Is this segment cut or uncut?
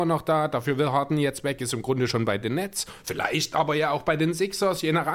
uncut